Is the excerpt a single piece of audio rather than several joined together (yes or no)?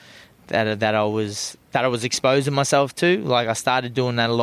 yes